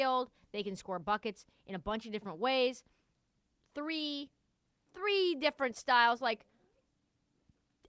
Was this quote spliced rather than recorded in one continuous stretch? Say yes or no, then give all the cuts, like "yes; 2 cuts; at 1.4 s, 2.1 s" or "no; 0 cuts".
no; 0 cuts